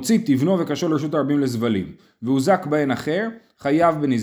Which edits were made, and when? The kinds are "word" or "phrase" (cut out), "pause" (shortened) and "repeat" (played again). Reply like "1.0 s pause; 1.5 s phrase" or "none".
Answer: none